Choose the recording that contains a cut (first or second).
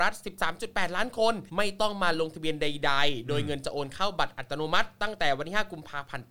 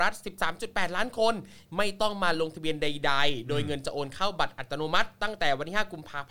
first